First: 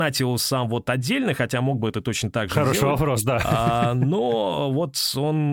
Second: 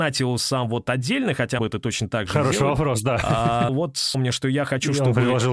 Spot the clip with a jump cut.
second; 3 cuts; at 1.6 s, 3.7 s, 4.1 s

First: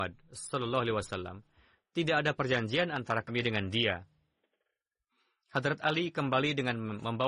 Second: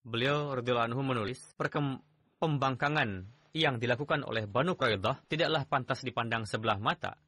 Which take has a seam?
second; 2 cuts; at 1.5 s, 5.2 s

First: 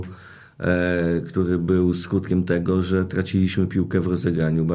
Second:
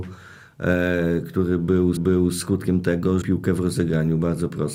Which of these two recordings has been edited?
second; 2 cuts; at 2.0 s, 3.2 s

